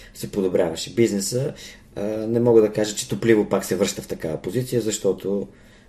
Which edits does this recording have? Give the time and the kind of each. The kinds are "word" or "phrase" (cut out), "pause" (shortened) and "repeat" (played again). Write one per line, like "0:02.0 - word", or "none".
none